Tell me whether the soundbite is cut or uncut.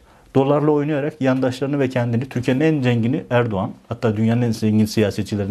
uncut